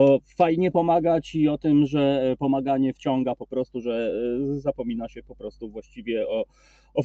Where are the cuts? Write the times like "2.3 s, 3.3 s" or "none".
none